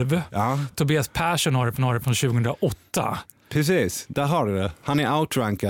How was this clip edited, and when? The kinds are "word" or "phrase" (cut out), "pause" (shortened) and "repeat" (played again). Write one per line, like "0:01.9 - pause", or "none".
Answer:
0:01.8 - repeat